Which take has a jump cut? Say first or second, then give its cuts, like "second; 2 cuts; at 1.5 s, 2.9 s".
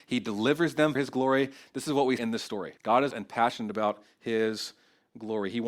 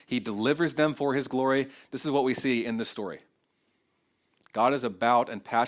first; 4 cuts; at 1.0 s, 2.2 s, 2.8 s, 3.1 s